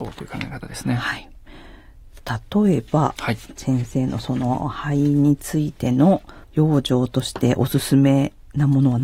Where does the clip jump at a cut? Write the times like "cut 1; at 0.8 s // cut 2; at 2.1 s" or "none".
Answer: cut 1; at 6.4 s